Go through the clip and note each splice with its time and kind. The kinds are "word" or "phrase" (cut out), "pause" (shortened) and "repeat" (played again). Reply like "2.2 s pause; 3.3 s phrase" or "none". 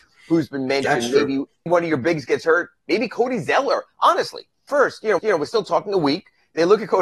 1.7 s word; 4.7 s phrase; 5.2 s repeat